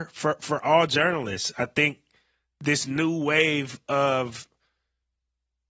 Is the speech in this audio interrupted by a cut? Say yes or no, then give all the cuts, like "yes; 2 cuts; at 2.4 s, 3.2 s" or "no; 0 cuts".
no; 0 cuts